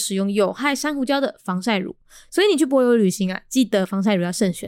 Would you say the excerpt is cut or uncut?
uncut